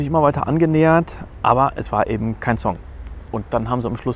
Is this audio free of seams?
yes; 0 cuts

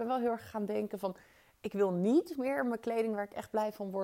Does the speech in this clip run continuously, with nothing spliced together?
yes; 0 cuts

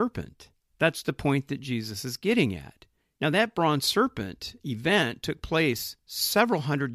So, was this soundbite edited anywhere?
no; 0 cuts

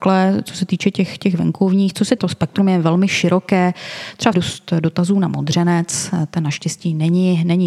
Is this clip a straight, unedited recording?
no; 2 cuts; at 2.2 s, 4.3 s

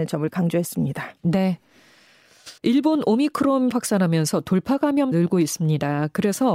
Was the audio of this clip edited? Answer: yes; 3 cuts; at 2.6 s, 3.7 s, 5.1 s

